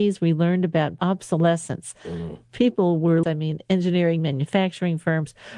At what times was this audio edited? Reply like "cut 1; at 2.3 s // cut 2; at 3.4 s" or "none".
cut 1; at 1.0 s // cut 2; at 3.2 s